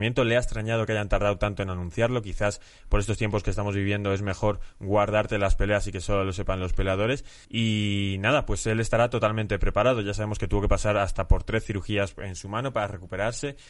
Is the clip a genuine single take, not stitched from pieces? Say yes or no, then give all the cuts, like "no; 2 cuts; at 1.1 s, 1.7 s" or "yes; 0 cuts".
no; 1 cut; at 7.4 s